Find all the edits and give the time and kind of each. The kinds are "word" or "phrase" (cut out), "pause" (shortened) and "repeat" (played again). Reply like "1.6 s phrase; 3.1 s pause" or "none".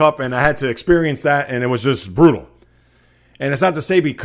none